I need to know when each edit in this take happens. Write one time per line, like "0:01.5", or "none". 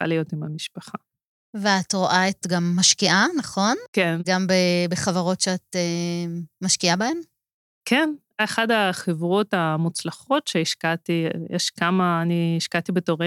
0:02.4
0:04.2